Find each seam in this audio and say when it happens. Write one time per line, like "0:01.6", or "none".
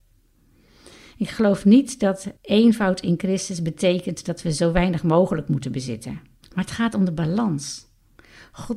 0:02.4
0:06.4